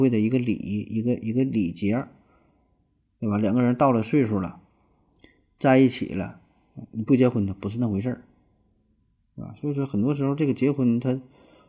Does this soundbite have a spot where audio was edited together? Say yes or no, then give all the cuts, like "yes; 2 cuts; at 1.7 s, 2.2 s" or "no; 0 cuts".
no; 0 cuts